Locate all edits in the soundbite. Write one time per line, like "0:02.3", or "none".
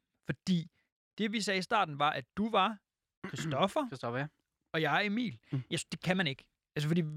none